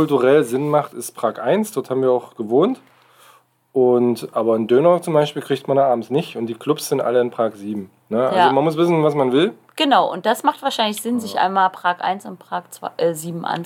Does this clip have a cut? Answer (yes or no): no